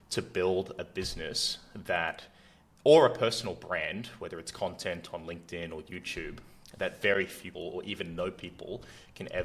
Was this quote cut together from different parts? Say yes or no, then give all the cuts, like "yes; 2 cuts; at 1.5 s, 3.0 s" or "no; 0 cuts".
yes; 1 cut; at 7.5 s